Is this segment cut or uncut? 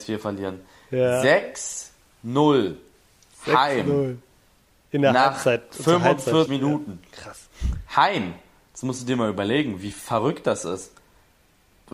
cut